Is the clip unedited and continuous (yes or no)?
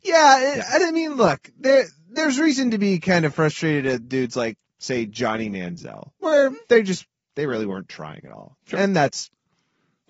no